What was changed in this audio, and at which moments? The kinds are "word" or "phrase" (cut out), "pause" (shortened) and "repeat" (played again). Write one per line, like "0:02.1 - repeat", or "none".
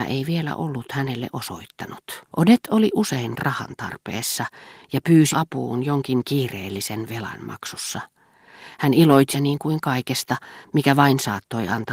0:02.3 - pause
0:05.3 - word
0:09.3 - word